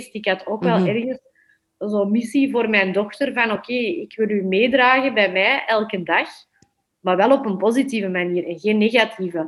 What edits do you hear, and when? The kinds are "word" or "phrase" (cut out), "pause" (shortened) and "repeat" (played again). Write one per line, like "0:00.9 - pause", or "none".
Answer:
none